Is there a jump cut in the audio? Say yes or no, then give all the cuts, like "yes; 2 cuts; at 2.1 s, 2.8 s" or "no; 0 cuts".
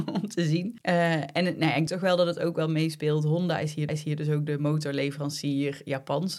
yes; 2 cuts; at 1.9 s, 3.9 s